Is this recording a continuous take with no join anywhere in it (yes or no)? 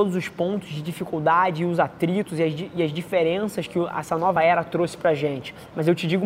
yes